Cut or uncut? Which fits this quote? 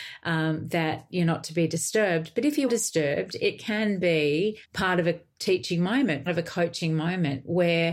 cut